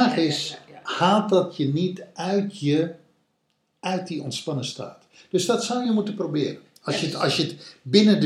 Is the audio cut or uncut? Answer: uncut